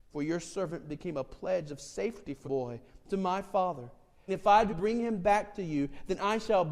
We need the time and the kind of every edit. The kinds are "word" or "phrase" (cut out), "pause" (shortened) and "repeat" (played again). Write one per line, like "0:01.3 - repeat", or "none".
0:02.4 - word
0:04.3 - word
0:04.7 - word